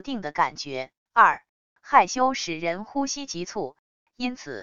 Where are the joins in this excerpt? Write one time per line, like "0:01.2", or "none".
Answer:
0:01.0